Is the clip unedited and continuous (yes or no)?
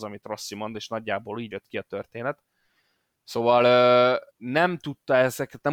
no